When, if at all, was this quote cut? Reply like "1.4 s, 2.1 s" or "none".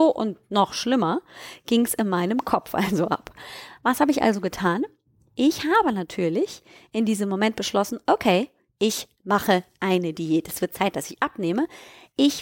9.1 s